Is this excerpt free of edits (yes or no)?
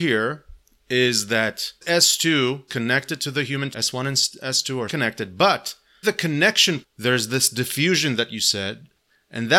no